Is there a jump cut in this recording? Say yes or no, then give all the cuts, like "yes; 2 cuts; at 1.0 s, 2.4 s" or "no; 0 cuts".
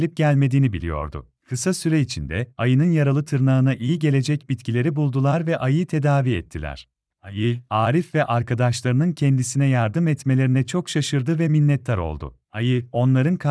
yes; 3 cuts; at 1.4 s, 7.1 s, 12.4 s